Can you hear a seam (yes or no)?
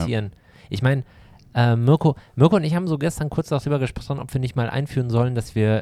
no